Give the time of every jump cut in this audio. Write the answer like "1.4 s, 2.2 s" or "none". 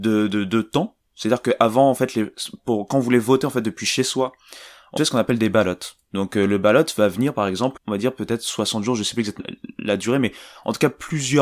5.0 s, 7.8 s, 9.4 s

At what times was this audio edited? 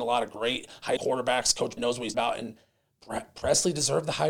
1.0 s, 1.8 s, 2.1 s

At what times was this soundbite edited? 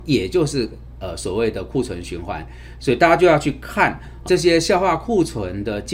4.3 s

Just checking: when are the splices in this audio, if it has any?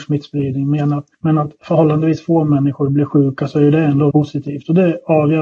1.1 s, 4.1 s

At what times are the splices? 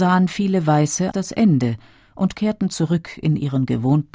1.1 s

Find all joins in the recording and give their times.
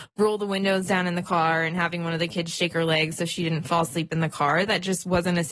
none

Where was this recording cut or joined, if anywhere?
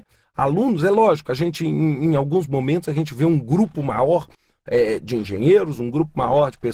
none

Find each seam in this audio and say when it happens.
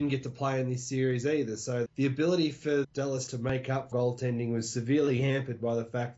1.9 s, 2.8 s, 3.3 s, 3.9 s

